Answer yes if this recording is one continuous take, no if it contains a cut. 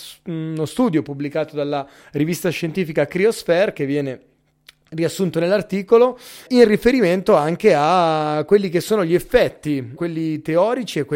no